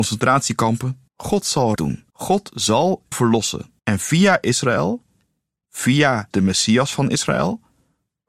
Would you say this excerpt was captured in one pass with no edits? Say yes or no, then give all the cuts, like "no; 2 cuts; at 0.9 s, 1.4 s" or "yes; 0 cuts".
no; 6 cuts; at 1.1 s, 1.8 s, 2.1 s, 3.1 s, 3.8 s, 6.3 s